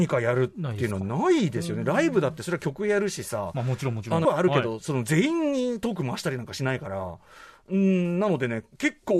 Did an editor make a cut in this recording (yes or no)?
yes